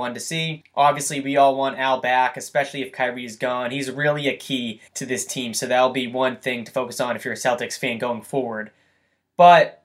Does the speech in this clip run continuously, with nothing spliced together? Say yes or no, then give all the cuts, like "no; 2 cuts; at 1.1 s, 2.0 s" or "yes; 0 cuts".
no; 1 cut; at 4.9 s